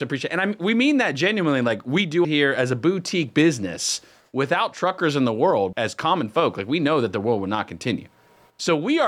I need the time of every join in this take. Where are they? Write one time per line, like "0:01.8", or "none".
0:02.2
0:05.7